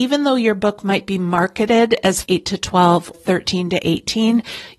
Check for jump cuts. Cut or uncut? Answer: cut